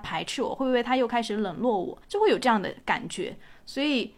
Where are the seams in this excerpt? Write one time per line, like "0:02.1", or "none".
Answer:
0:02.0